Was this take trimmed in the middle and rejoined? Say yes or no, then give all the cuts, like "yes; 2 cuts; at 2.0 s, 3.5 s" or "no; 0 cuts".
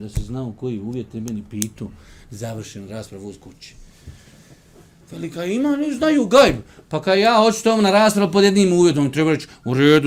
no; 0 cuts